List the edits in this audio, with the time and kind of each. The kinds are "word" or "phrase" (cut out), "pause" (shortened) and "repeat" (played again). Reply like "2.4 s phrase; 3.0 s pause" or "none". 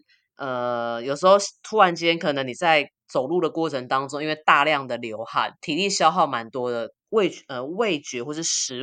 5.6 s pause; 7.0 s pause